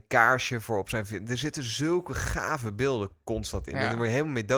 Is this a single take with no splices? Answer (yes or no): yes